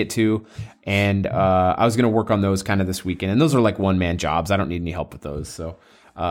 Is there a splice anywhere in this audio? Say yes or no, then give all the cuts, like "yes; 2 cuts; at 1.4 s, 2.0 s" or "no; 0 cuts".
no; 0 cuts